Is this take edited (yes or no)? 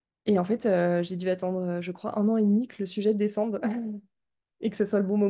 no